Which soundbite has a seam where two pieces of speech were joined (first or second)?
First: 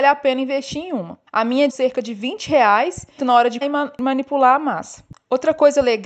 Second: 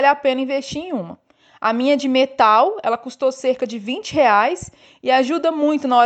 first